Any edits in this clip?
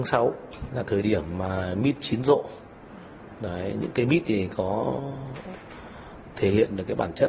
no; 0 cuts

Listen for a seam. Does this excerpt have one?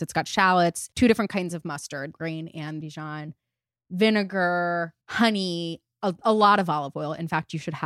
yes; 4 cuts; at 0.9 s, 2.1 s, 2.8 s, 5.0 s

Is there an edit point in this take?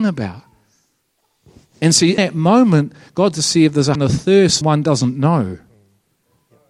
yes; 4 cuts; at 2.2 s, 3.3 s, 3.9 s, 4.6 s

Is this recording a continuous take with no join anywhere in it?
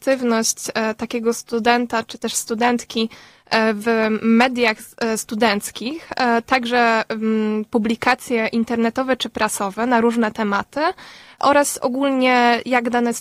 yes; 0 cuts

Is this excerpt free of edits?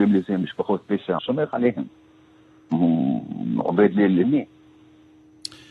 no; 2 cuts; at 1.2 s, 4.2 s

